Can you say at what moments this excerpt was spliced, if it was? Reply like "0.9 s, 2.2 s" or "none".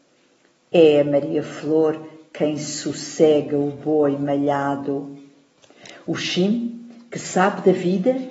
none